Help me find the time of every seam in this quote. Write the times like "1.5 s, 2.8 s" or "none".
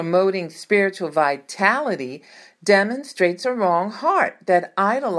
none